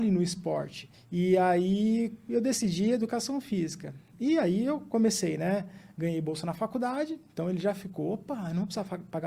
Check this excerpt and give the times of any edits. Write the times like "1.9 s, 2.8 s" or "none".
0.9 s